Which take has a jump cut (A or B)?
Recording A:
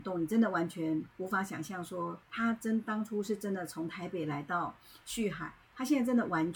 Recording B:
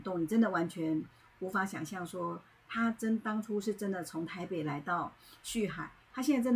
A